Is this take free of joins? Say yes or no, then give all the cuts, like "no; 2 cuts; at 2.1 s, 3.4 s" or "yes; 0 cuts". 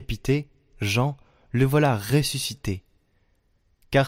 yes; 0 cuts